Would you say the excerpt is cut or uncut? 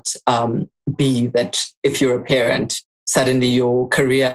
cut